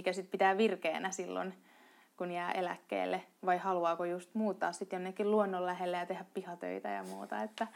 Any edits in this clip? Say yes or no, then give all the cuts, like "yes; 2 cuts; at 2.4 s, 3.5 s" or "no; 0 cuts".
no; 0 cuts